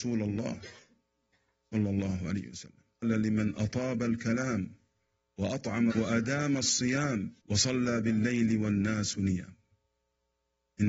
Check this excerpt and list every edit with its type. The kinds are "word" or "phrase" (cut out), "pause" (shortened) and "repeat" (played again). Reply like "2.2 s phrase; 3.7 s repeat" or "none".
3.0 s word; 5.9 s word; 7.4 s pause